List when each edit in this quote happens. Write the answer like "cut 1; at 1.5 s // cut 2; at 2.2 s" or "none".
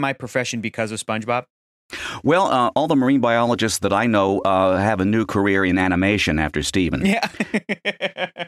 none